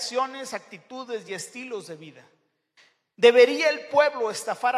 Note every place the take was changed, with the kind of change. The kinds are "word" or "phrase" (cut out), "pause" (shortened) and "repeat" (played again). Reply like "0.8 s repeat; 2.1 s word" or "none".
none